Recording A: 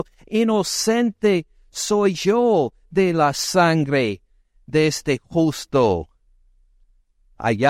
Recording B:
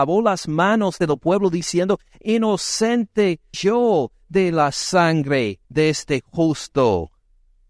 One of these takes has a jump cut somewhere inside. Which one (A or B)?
B